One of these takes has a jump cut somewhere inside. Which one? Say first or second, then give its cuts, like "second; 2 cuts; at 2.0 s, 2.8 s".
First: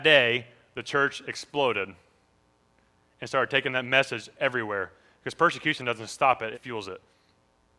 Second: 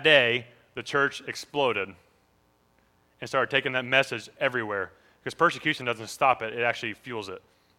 first; 1 cut; at 6.5 s